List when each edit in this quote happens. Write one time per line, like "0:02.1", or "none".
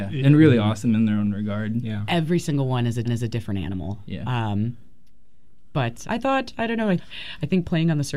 0:03.0
0:06.0
0:07.0